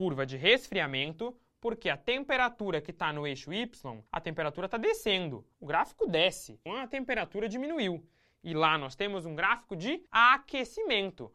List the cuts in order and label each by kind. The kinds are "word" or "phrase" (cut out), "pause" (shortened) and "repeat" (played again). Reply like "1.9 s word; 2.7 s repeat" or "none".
4.1 s pause; 5.5 s pause; 6.7 s word; 10.1 s pause